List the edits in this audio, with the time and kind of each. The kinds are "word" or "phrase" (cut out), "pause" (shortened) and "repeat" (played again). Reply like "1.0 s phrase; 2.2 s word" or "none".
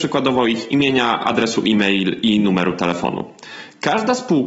none